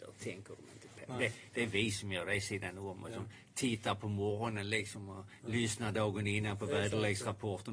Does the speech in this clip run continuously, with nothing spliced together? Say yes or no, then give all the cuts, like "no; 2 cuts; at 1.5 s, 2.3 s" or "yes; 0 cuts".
yes; 0 cuts